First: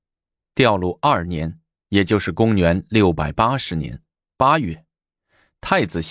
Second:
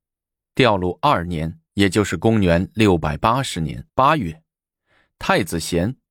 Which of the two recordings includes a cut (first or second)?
second